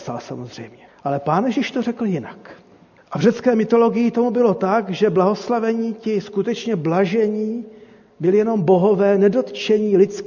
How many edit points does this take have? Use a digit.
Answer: 0